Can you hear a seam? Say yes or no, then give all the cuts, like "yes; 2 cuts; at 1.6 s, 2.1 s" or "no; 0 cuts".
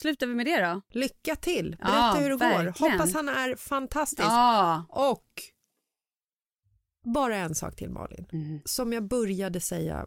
no; 0 cuts